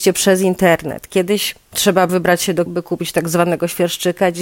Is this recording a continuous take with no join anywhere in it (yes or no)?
no